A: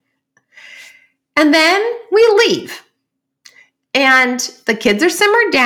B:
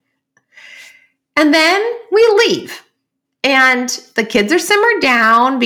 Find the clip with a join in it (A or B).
B